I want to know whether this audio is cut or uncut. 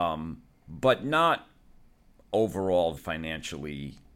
cut